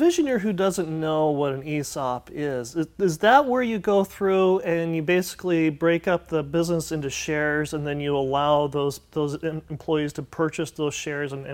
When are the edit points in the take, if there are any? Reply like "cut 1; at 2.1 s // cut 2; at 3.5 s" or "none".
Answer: none